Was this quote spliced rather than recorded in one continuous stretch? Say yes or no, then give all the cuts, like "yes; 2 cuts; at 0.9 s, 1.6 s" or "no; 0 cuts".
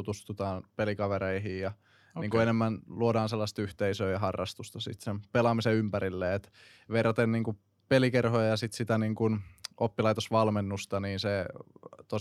no; 0 cuts